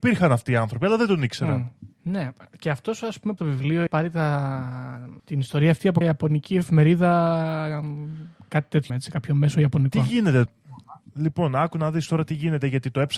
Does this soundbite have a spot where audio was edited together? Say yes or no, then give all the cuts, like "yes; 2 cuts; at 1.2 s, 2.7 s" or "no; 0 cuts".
yes; 7 cuts; at 1.9 s, 3.4 s, 3.9 s, 5.2 s, 6.0 s, 8.9 s, 10.5 s